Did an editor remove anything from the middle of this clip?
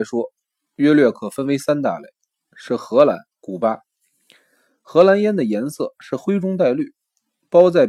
yes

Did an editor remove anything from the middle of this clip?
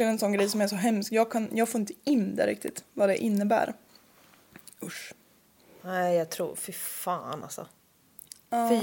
no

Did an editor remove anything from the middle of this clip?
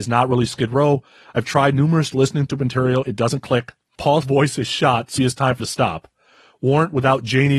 yes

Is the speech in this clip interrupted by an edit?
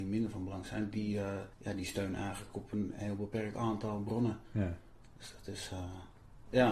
yes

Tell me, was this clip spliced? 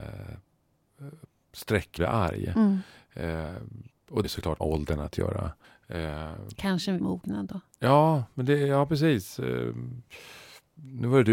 yes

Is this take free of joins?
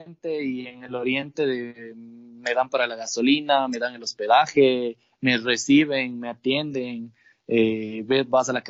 yes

